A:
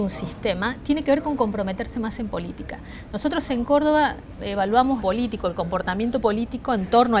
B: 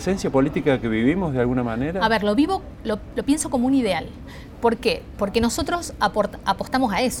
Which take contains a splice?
A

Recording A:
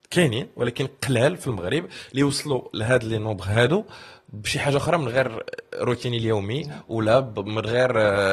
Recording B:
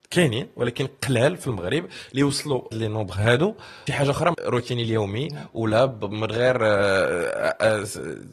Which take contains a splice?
B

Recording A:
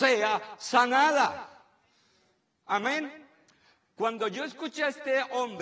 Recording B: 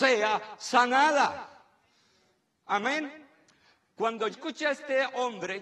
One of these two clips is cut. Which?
B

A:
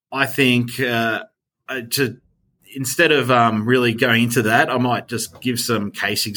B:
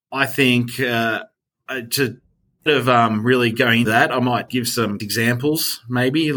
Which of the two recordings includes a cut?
B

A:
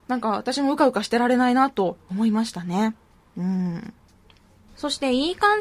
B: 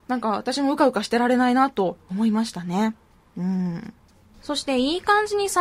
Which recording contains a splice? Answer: B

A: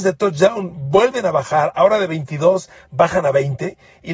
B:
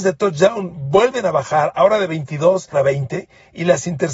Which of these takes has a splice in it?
B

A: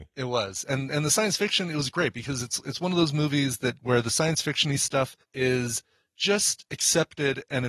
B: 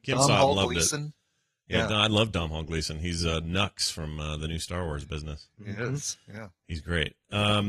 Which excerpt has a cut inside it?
A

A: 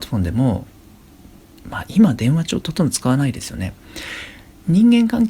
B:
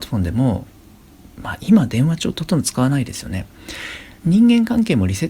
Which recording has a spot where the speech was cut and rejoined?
B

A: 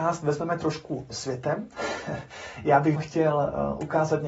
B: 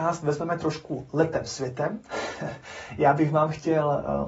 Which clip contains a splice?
A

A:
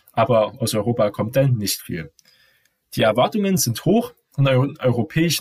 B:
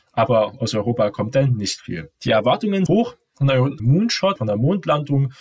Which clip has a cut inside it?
B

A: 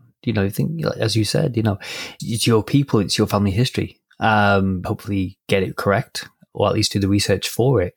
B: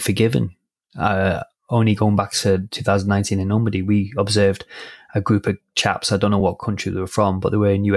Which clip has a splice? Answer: A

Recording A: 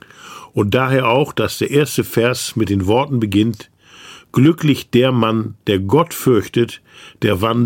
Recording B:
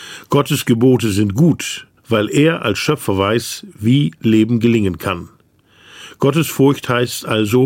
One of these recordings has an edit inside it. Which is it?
B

